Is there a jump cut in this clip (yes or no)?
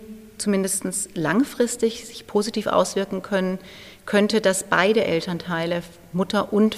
no